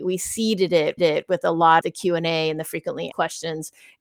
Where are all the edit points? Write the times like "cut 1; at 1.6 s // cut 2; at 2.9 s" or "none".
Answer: cut 1; at 1.0 s // cut 2; at 1.8 s // cut 3; at 3.1 s